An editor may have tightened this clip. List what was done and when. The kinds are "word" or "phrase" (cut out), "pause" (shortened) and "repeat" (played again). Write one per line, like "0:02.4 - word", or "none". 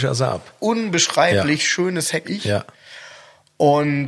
0:02.2 - word